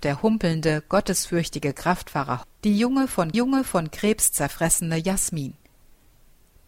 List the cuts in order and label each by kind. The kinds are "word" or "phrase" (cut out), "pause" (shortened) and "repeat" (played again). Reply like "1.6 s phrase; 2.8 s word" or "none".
2.4 s word; 3.3 s repeat